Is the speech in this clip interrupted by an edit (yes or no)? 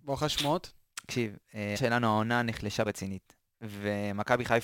yes